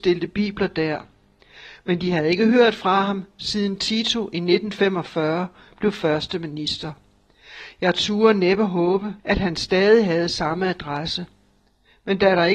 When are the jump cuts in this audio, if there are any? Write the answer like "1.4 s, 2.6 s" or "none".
9.2 s